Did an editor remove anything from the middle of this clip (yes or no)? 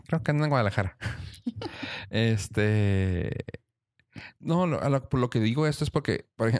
no